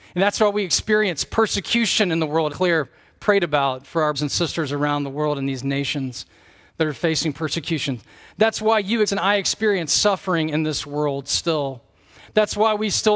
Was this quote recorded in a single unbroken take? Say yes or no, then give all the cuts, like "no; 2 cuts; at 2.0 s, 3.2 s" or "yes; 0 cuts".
no; 3 cuts; at 2.5 s, 4.1 s, 9.0 s